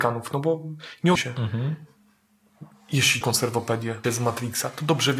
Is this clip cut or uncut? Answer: cut